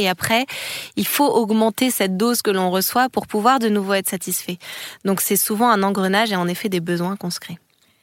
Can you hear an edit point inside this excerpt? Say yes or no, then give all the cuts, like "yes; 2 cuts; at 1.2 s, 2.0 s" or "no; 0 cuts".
no; 0 cuts